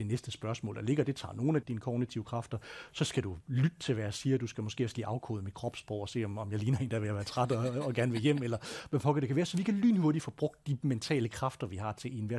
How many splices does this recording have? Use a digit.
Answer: 1